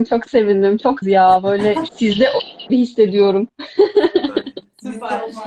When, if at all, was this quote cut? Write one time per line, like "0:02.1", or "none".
0:01.0
0:01.9
0:02.7